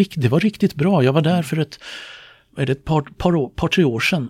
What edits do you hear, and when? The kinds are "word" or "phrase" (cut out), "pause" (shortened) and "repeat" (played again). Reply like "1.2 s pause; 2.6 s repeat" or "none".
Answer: none